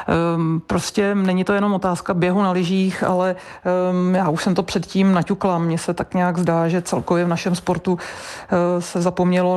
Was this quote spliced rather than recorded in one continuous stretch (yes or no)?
no